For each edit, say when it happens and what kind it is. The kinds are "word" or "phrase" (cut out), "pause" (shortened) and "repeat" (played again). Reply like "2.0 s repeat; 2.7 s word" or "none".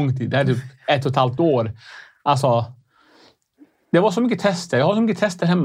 none